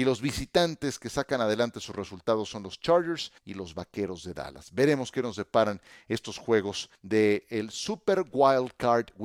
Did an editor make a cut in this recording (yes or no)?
yes